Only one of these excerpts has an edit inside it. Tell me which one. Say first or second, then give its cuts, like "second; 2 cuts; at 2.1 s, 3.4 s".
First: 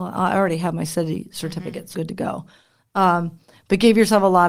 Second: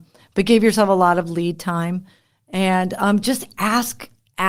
first; 1 cut; at 1.9 s